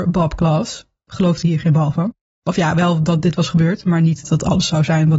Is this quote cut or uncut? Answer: cut